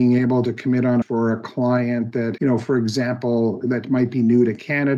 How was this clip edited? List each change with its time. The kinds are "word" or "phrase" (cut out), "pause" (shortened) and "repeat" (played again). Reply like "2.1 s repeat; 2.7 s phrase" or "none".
1.0 s phrase; 2.4 s word